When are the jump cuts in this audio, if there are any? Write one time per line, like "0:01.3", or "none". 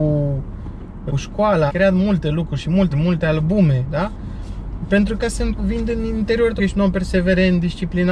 0:01.1
0:01.7
0:02.9
0:05.2
0:05.6
0:06.6